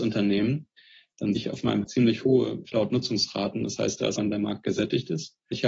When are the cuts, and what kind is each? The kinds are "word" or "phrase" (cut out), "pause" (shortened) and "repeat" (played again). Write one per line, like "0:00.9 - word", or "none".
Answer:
0:01.4 - word
0:01.8 - word
0:04.2 - word